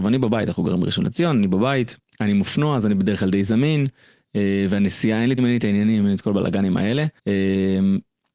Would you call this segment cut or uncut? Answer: cut